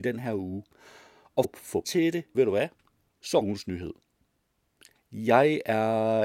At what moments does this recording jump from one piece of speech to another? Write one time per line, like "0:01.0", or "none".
0:01.4
0:01.8
0:02.3
0:03.1
0:03.4